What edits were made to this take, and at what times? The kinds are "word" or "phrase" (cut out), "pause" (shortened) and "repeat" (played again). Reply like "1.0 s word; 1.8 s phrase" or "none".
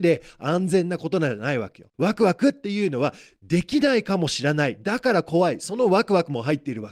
1.9 s pause